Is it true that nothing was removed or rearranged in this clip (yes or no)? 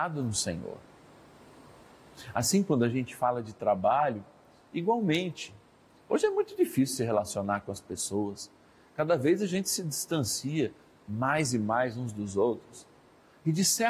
yes